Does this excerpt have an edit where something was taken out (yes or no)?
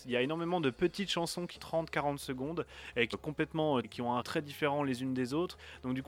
yes